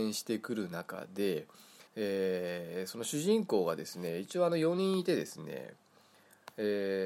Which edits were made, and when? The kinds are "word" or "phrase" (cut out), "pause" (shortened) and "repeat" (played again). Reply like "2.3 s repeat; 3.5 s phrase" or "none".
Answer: 1.9 s pause